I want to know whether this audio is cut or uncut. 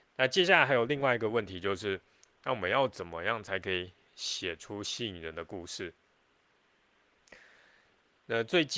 uncut